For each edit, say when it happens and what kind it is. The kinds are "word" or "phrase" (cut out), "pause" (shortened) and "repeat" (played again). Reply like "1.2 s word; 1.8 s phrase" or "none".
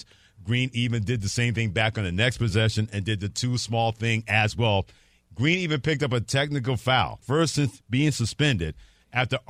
7.2 s word